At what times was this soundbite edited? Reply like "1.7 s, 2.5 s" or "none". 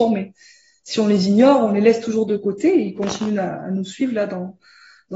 none